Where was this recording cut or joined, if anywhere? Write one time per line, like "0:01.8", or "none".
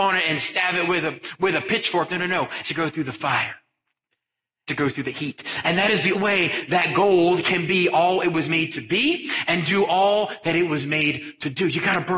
0:02.6
0:04.7
0:06.1